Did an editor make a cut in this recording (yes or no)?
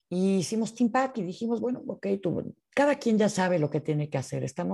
no